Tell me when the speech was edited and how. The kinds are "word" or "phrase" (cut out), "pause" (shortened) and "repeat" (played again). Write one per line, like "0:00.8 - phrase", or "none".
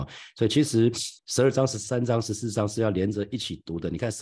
0:01.2 - pause